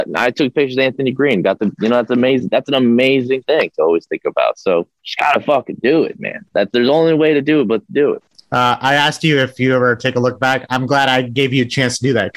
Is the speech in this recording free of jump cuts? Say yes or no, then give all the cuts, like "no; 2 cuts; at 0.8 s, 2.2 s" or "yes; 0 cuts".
no; 2 cuts; at 5.0 s, 8.3 s